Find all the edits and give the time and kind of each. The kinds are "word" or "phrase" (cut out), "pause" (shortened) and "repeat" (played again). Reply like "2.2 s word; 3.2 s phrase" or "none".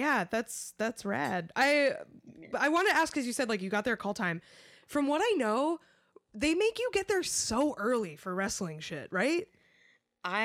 none